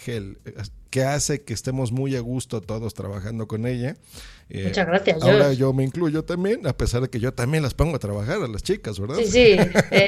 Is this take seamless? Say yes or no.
yes